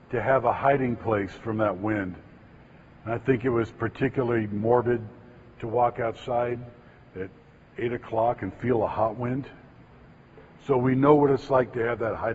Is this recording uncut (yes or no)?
yes